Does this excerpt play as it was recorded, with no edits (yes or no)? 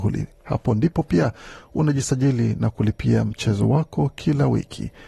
yes